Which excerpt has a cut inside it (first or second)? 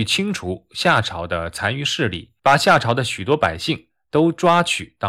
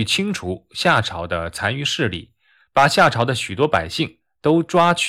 first